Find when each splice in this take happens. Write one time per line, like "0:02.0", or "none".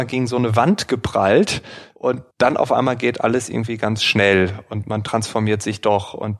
0:02.3